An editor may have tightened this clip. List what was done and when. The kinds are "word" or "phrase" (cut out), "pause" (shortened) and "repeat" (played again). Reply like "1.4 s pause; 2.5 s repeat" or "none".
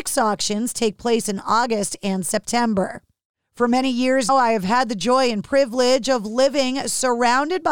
4.3 s word